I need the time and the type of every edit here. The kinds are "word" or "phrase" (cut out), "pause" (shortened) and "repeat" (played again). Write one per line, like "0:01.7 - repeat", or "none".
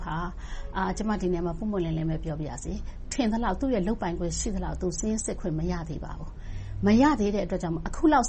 0:03.1 - word